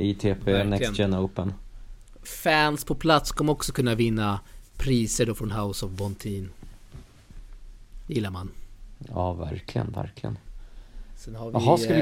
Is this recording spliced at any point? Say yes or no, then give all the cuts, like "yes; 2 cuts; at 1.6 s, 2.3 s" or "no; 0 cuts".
no; 0 cuts